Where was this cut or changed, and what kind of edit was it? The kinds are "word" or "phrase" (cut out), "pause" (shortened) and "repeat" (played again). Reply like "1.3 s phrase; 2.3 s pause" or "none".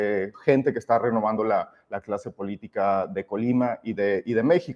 none

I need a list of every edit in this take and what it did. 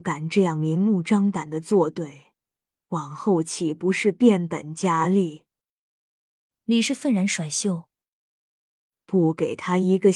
none

